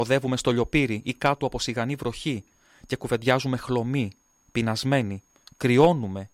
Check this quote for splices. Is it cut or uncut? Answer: uncut